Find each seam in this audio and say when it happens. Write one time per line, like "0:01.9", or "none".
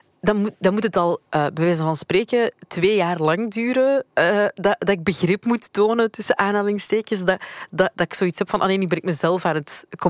0:01.2
0:04.1

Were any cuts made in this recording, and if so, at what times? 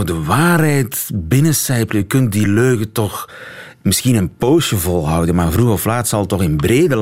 none

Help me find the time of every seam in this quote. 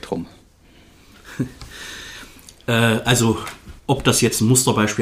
0:03.8

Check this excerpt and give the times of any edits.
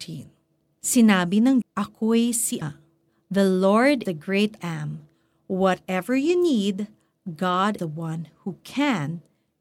0:01.6
0:02.6
0:04.1
0:04.6
0:07.8

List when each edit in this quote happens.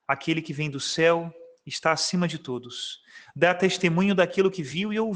none

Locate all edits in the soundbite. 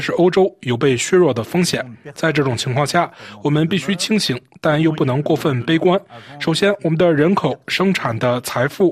none

